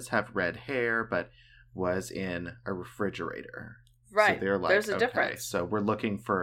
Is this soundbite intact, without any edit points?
yes; 0 cuts

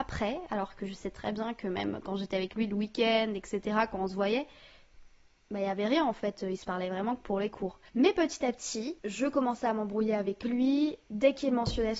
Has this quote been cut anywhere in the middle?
no; 0 cuts

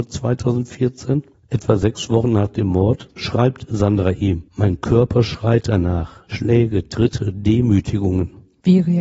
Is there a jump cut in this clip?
yes; 2 cuts; at 1.3 s, 4.5 s

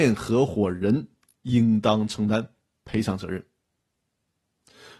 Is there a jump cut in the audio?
no; 0 cuts

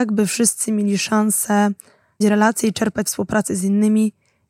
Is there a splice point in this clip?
yes; 2 cuts; at 2.2 s, 3.1 s

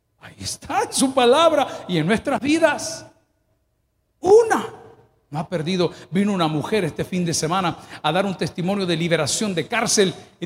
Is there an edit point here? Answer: no; 0 cuts

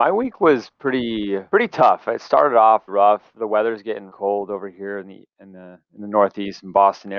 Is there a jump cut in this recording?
yes; 3 cuts; at 1.5 s, 2.9 s, 4.1 s

